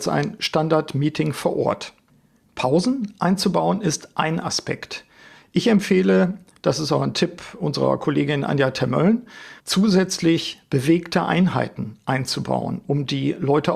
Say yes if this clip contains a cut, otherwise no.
yes